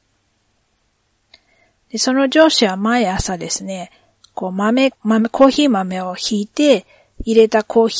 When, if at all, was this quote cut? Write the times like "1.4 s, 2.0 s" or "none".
5.0 s